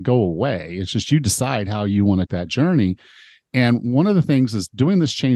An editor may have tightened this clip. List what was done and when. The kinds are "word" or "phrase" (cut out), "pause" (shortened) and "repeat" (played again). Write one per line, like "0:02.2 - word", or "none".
0:02.3 - word